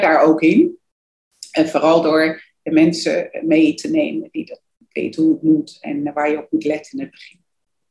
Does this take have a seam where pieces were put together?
no; 0 cuts

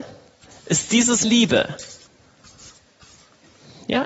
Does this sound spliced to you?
yes; 1 cut; at 1.2 s

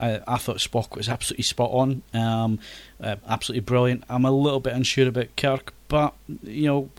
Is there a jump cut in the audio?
yes; 1 cut; at 3.2 s

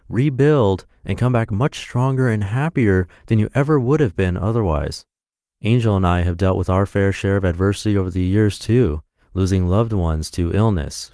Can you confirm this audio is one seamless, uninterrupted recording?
yes; 0 cuts

